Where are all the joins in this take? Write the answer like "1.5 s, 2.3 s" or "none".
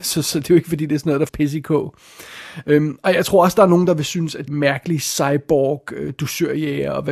1.3 s, 4.5 s